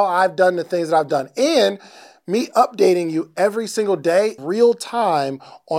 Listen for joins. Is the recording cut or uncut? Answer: cut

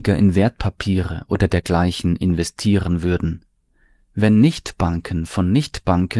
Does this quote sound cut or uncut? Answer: uncut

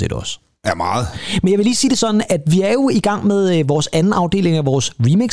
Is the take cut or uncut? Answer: uncut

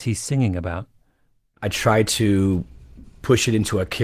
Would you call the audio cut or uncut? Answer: uncut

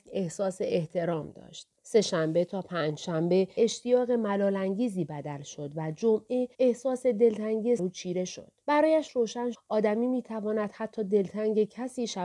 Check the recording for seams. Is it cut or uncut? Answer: cut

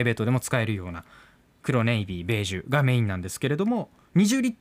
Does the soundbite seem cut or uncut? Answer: uncut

